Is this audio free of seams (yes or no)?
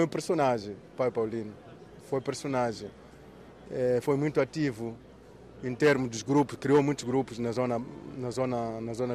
yes